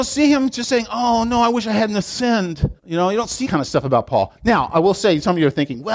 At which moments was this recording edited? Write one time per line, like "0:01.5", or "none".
0:02.8
0:03.4